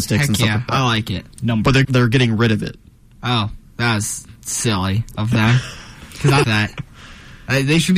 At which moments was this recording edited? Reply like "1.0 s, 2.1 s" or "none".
1.3 s, 1.8 s, 3.7 s, 6.4 s